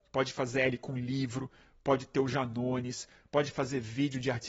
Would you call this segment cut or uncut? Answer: uncut